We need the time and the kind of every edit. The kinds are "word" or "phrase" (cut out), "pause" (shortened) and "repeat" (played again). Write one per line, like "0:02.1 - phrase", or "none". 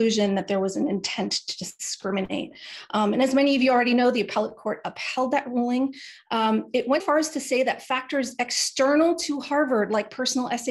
0:07.0 - word